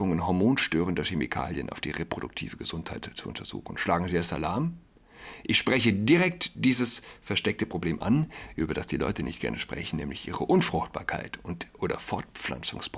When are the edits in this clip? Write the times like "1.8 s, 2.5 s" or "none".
none